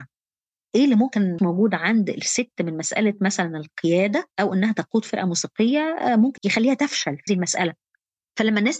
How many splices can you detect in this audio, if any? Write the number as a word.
four